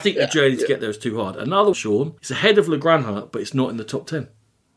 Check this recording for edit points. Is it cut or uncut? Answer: cut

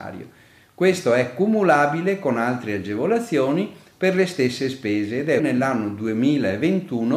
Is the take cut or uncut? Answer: cut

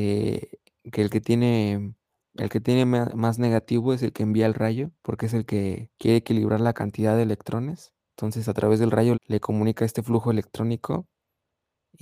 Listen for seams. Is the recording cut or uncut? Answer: cut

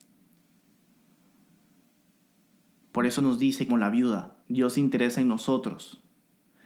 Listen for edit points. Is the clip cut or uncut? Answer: cut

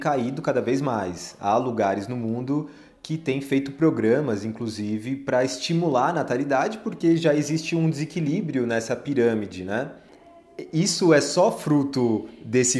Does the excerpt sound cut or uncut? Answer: uncut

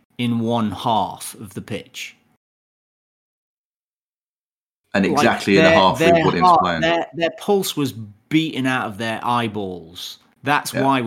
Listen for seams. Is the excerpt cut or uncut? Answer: uncut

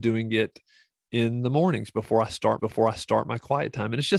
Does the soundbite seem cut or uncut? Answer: cut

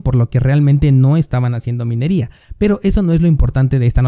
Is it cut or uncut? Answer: uncut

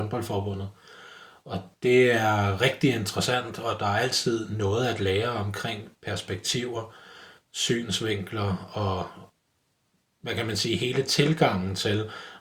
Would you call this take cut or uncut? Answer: uncut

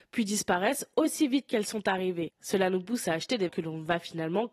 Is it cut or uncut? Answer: cut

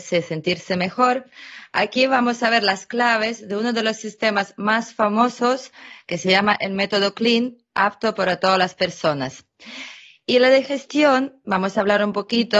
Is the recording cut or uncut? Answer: uncut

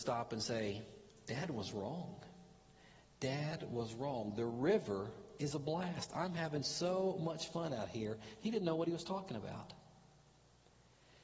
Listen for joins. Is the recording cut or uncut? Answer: uncut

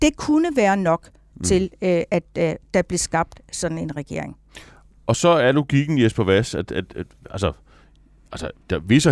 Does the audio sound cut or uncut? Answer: uncut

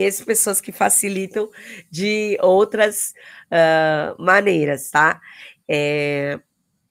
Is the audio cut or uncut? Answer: uncut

